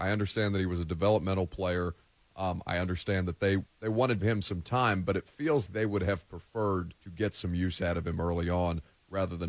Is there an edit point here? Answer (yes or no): yes